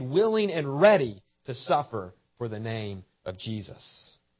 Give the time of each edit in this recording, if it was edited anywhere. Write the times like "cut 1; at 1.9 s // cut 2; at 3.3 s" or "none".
none